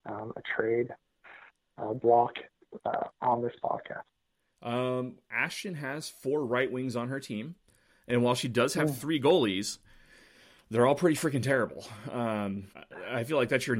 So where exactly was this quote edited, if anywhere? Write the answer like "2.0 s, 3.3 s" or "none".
12.7 s